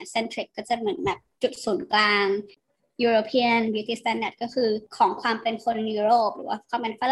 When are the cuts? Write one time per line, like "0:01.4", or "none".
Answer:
none